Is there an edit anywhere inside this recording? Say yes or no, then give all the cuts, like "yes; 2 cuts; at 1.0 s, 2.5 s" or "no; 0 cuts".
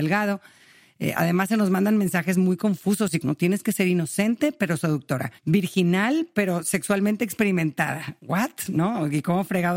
yes; 2 cuts; at 3.2 s, 5.4 s